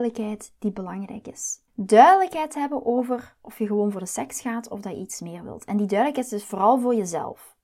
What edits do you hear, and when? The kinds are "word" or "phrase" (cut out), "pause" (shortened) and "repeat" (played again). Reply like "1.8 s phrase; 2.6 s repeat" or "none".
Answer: 1.7 s pause